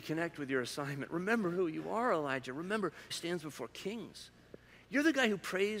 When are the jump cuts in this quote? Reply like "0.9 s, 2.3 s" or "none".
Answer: 3.1 s